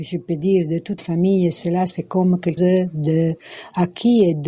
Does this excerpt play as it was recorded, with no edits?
no; 2 cuts; at 1.0 s, 2.6 s

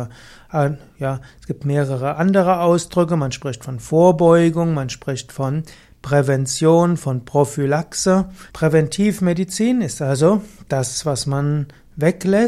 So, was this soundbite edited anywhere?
yes; 1 cut; at 8.5 s

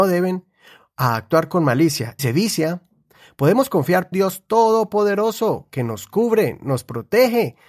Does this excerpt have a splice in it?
yes; 2 cuts; at 2.2 s, 4.1 s

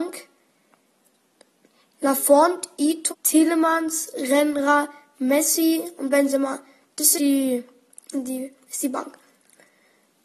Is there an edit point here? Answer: yes; 3 cuts; at 3.1 s, 7.1 s, 8.1 s

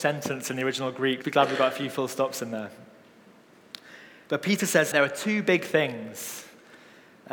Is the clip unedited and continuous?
no; 2 cuts; at 1.2 s, 4.9 s

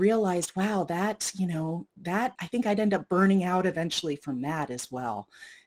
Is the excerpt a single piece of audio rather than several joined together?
no; 1 cut; at 2.4 s

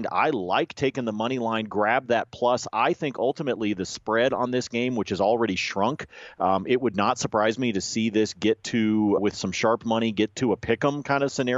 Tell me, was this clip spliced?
yes; 1 cut; at 9.2 s

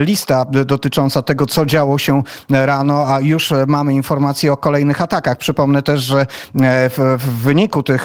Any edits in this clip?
no; 0 cuts

